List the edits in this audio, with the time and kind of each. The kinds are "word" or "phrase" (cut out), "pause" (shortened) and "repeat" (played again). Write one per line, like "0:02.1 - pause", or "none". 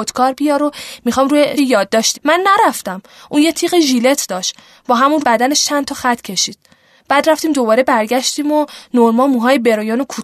0:01.6 - word
0:02.1 - word
0:05.2 - word